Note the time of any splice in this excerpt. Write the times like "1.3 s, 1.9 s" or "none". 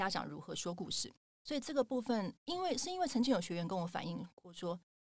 none